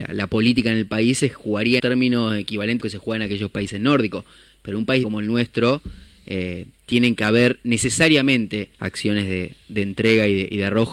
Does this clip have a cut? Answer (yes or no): yes